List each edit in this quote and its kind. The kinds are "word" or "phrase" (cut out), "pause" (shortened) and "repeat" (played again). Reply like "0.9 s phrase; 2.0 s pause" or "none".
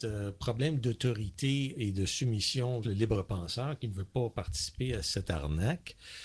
1.7 s word; 2.8 s word